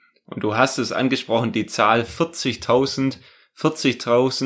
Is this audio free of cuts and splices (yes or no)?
yes